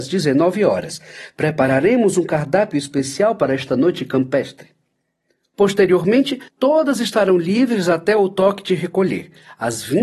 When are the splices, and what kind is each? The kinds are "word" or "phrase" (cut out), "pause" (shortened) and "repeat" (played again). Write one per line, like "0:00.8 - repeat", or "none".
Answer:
0:06.5 - pause